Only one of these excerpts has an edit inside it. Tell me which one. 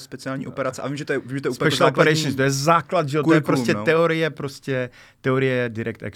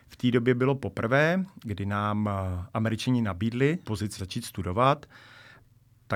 second; 2 cuts; at 3.8 s, 4.2 s

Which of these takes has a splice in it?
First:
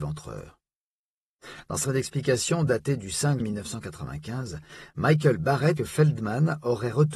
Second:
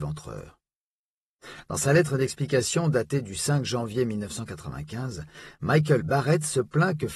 first; 3 cuts; at 1.8 s, 3.4 s, 5.8 s

